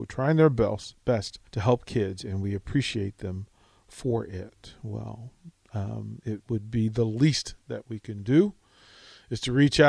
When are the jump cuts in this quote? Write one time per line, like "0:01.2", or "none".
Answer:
0:01.5